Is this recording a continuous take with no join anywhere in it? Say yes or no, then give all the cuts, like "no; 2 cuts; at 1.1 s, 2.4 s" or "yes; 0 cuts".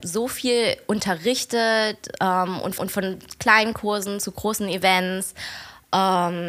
no; 1 cut; at 2.8 s